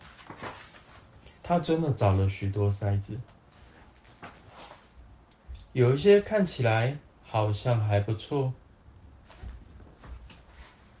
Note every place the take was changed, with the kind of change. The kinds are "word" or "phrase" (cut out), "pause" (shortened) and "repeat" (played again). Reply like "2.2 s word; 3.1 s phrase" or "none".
1.4 s pause